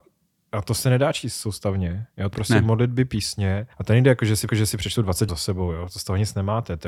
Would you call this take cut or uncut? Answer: cut